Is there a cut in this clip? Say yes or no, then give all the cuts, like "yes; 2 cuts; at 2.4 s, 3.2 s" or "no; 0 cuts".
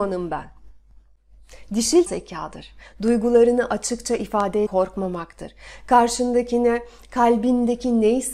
yes; 2 cuts; at 2.1 s, 4.7 s